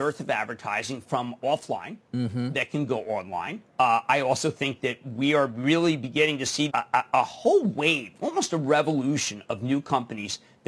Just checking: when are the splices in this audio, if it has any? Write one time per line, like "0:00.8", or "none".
0:01.4
0:03.7
0:06.7